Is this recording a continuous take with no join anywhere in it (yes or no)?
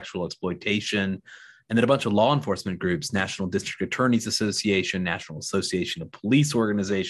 yes